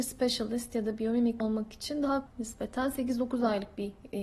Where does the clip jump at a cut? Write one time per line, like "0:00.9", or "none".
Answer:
0:01.4
0:02.3